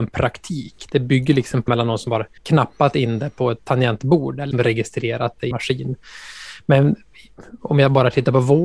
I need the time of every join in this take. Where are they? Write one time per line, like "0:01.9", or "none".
0:01.7
0:02.4
0:04.5
0:05.5